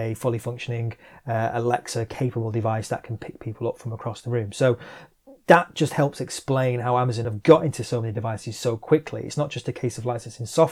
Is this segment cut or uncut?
uncut